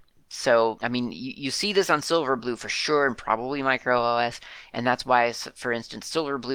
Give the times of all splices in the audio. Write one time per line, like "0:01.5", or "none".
none